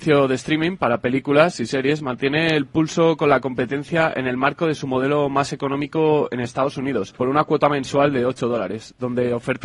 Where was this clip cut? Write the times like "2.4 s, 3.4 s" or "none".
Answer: 7.1 s